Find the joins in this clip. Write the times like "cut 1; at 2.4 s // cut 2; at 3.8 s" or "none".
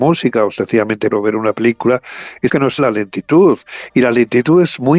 cut 1; at 1.1 s // cut 2; at 2.5 s // cut 3; at 2.8 s